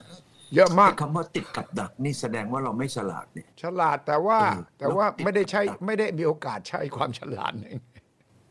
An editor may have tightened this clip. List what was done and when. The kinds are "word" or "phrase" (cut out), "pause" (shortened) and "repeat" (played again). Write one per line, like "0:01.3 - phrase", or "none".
0:03.5 - pause
0:04.7 - pause